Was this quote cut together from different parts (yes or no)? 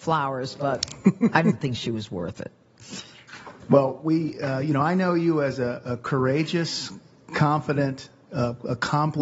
no